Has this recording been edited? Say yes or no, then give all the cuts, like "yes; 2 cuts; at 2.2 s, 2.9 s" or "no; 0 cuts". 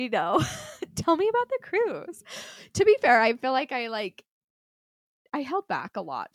no; 0 cuts